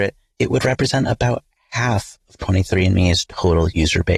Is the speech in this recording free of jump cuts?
yes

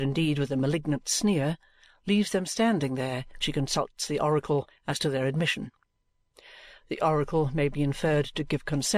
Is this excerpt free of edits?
no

